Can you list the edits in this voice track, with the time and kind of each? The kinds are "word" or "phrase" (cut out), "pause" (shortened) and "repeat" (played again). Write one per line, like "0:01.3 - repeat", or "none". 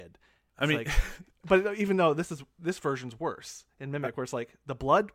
none

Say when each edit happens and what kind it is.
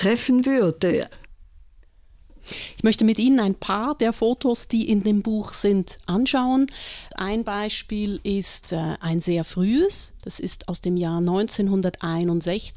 none

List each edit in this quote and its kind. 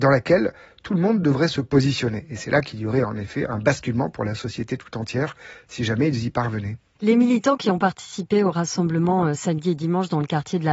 none

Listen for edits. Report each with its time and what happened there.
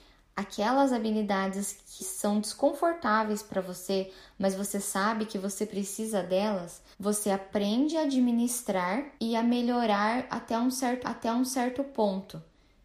0:02.0 - word
0:06.9 - pause
0:09.2 - pause
0:11.0 - repeat

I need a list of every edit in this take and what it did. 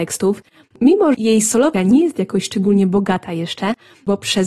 0:01.1 - word
0:01.7 - word

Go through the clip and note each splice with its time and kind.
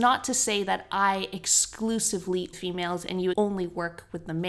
0:02.5 - phrase
0:03.3 - word

